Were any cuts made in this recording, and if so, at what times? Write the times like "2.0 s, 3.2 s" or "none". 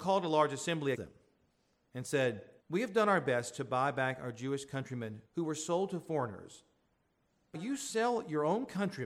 0.9 s, 2.6 s, 5.3 s, 7.5 s